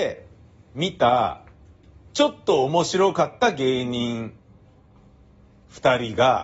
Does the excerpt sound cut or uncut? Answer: cut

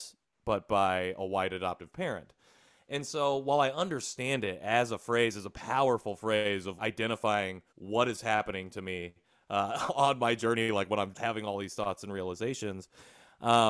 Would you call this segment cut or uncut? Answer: cut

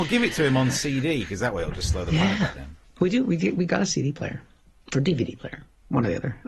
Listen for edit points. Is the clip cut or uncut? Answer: uncut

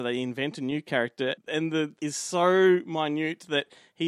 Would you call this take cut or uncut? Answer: cut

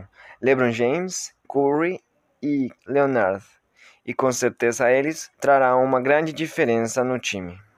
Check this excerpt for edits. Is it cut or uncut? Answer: cut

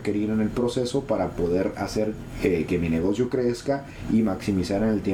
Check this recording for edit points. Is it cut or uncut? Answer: uncut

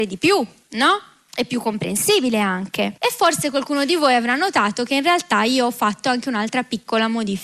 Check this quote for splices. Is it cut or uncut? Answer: cut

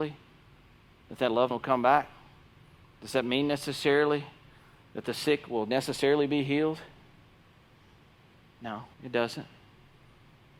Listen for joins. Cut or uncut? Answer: cut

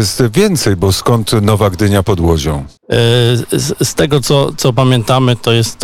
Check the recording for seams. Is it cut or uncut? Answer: cut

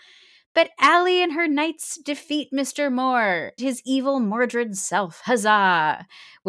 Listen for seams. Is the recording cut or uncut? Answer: cut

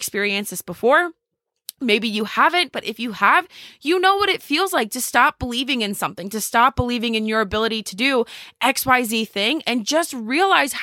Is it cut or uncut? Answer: uncut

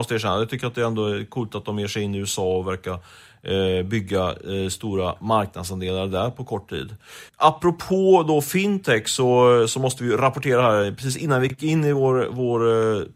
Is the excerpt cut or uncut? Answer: cut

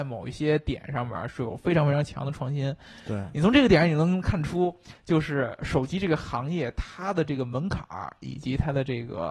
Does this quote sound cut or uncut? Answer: cut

